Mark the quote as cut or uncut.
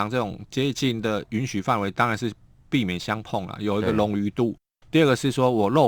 uncut